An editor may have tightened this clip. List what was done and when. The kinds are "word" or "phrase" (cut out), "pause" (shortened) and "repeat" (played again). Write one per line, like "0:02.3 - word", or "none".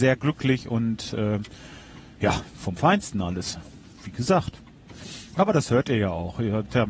none